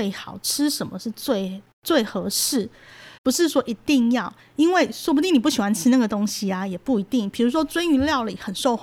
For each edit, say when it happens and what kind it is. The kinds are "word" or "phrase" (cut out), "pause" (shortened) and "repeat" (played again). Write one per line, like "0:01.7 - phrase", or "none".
0:03.2 - pause